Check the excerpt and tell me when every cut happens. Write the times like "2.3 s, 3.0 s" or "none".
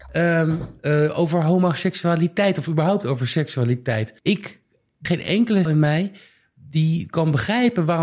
4.2 s, 5.1 s, 5.7 s